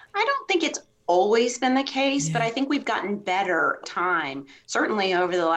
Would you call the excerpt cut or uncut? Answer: cut